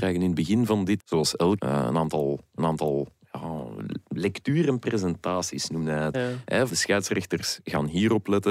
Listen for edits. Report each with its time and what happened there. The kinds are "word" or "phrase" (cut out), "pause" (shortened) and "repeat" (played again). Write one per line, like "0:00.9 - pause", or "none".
0:01.0 - word
0:01.6 - word
0:02.6 - repeat
0:06.1 - word
0:06.7 - phrase